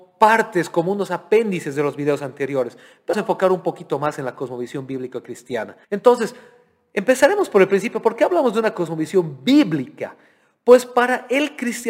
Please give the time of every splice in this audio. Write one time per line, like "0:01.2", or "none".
0:03.1
0:05.8